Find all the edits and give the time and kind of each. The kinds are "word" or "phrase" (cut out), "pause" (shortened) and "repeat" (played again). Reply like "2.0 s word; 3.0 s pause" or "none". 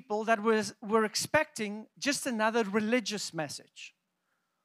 none

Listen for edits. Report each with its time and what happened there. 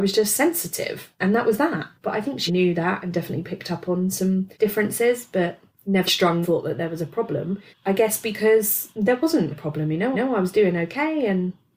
1.9 s pause; 2.5 s word; 4.5 s pause; 6.1 s word; 6.4 s phrase; 7.7 s pause; 9.5 s word; 10.1 s repeat

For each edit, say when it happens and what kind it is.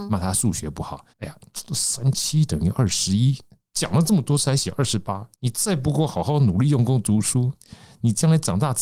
1.1 s pause; 5.3 s pause

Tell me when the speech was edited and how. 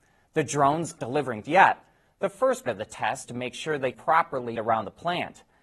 1.0 s word; 1.4 s word; 2.7 s word; 3.2 s word; 3.9 s word; 4.6 s word

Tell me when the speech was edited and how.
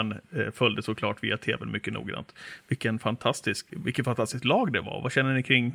3.7 s word

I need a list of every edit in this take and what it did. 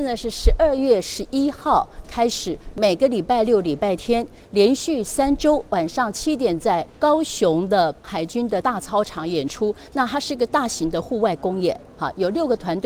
6.9 s pause

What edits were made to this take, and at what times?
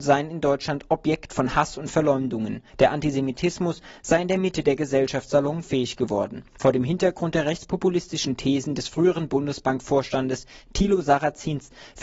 2.7 s pause; 6.5 s pause

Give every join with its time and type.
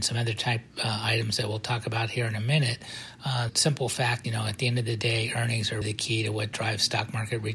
3.5 s word; 4.2 s word; 5.8 s word

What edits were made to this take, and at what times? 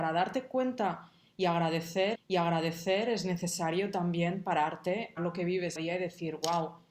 2.1 s repeat; 5.2 s word; 5.8 s phrase

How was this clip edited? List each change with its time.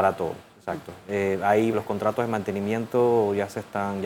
1.7 s word

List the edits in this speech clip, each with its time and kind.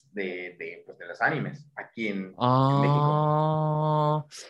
none

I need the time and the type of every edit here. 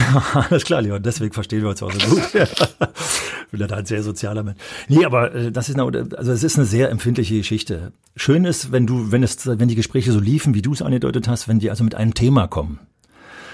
none

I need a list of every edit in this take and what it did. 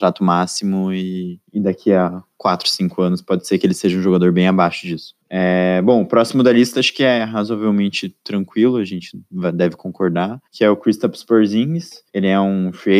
1.4 s pause; 5.2 s pause; 10.5 s pause; 12.1 s pause

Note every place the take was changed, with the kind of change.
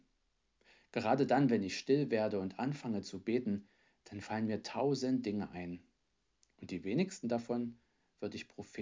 none

